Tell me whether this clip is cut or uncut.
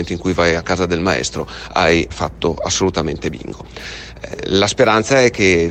cut